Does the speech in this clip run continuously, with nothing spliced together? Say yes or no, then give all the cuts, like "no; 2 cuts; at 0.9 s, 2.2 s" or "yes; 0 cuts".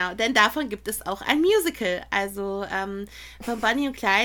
yes; 0 cuts